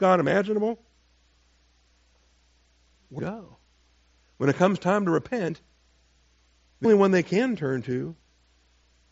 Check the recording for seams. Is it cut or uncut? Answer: cut